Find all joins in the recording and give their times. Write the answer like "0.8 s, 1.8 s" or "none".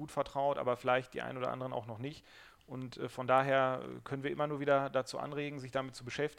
none